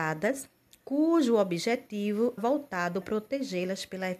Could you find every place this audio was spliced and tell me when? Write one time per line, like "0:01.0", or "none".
0:02.4
0:03.0